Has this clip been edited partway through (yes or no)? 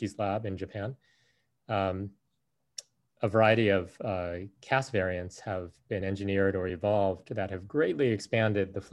no